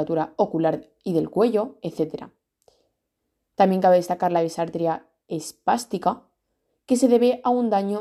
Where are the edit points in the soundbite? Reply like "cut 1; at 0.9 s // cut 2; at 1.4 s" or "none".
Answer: none